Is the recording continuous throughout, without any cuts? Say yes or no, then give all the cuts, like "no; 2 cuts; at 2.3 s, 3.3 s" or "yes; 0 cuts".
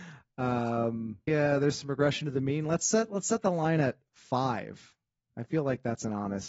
no; 1 cut; at 1.3 s